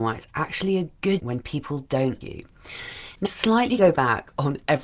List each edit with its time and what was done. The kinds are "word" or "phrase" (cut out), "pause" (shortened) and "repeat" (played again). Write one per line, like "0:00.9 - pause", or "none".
0:01.2 - word
0:02.2 - word
0:03.3 - word
0:03.8 - word

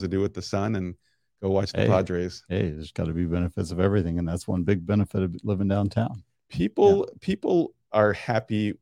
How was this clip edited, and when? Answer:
none

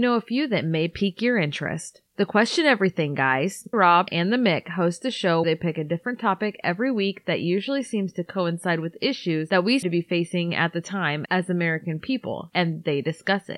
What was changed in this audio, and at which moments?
0:03.7 - word
0:04.1 - word
0:05.4 - word
0:09.8 - word

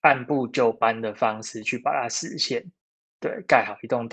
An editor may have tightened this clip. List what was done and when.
none

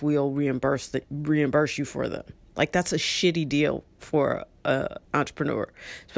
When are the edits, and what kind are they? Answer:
0:05.0 - pause

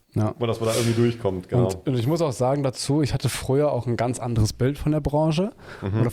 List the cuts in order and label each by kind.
none

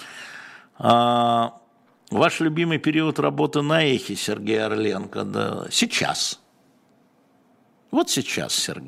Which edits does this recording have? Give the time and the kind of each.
none

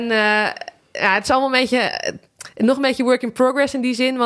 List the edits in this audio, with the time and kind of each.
none

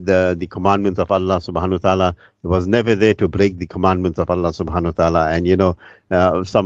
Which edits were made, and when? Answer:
none

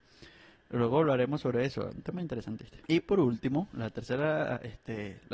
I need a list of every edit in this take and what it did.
0:02.8 - pause

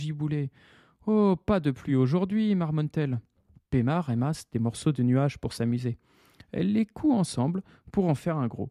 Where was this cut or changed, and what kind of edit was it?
none

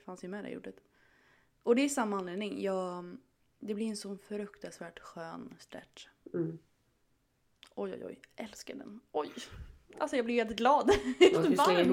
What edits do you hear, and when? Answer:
none

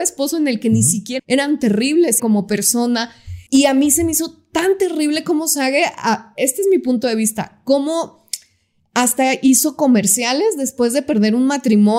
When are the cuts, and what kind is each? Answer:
0:01.2 - phrase
0:02.2 - phrase
0:03.5 - pause

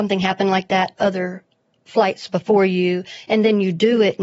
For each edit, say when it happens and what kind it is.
0:01.0 - word

